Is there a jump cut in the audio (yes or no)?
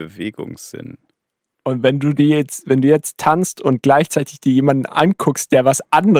no